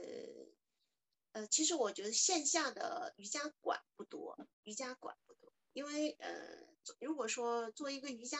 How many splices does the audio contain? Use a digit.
1